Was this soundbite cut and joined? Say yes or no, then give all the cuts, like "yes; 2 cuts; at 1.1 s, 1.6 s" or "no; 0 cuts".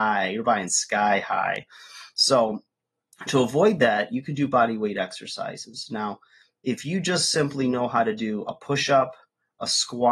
no; 0 cuts